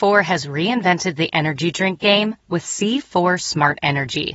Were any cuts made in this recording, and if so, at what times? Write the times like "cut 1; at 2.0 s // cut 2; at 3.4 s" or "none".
cut 1; at 2.4 s